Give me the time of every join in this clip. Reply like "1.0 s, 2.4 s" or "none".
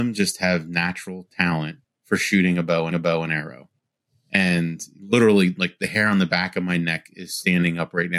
1.8 s, 2.9 s